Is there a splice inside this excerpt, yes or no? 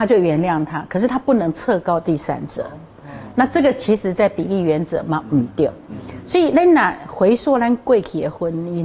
no